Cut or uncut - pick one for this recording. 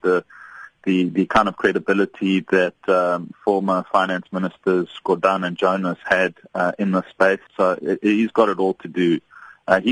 cut